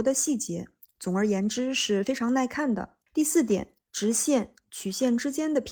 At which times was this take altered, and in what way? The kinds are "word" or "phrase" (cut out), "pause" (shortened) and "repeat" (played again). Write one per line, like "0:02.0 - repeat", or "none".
0:03.1 - pause
0:03.8 - pause
0:04.6 - phrase